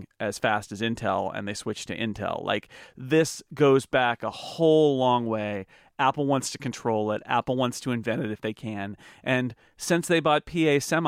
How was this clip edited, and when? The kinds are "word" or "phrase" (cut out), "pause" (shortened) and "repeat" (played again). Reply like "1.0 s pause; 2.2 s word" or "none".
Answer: none